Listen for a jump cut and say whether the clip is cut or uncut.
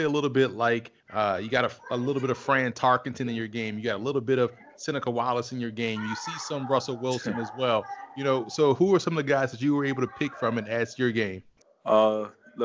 cut